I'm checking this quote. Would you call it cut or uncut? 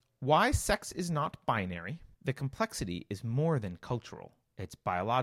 cut